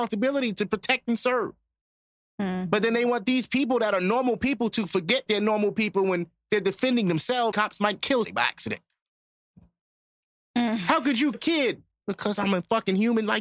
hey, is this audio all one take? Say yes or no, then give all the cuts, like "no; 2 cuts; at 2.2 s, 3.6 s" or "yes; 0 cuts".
no; 4 cuts; at 5.3 s, 7.5 s, 8.2 s, 11.3 s